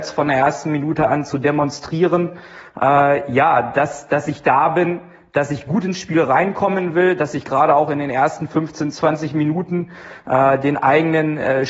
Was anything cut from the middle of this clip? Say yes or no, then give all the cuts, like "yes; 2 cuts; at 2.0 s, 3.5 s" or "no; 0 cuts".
no; 0 cuts